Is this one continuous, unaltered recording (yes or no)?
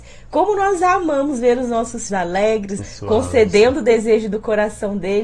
no